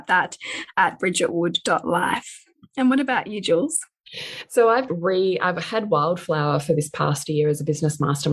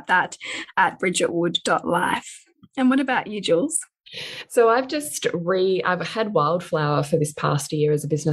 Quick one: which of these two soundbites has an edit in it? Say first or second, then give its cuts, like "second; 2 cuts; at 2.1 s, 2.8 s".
first; 1 cut; at 4.9 s